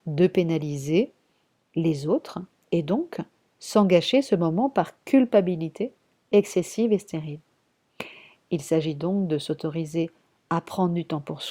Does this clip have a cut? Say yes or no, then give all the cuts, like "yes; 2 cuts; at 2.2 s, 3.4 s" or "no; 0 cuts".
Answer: no; 0 cuts